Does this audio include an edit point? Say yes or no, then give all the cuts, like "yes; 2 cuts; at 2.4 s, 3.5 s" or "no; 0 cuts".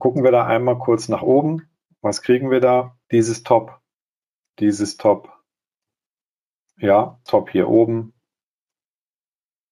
yes; 4 cuts; at 1.9 s, 3.0 s, 4.0 s, 7.3 s